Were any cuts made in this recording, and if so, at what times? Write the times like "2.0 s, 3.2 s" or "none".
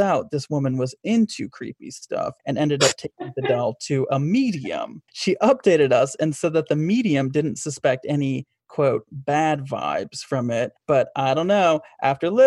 2.4 s, 5.1 s, 10.8 s